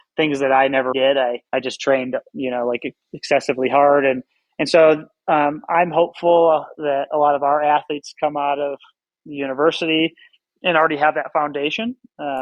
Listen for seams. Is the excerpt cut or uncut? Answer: cut